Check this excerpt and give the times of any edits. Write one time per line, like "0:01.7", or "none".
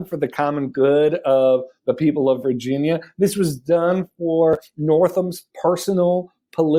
0:05.5